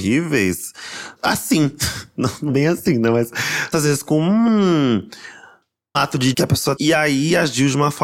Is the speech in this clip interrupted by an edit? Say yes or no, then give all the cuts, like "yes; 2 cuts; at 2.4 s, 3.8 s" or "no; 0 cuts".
yes; 6 cuts; at 1.2 s, 2.5 s, 3.7 s, 5.9 s, 6.3 s, 6.8 s